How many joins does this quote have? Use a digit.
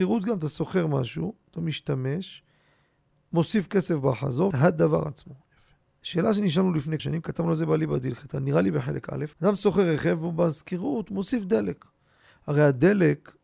4